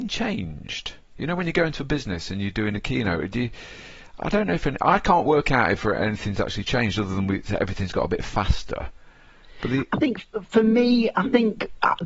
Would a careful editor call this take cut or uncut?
uncut